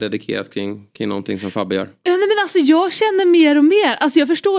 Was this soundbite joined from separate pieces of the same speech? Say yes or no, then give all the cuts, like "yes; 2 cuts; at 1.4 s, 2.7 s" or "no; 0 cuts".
no; 0 cuts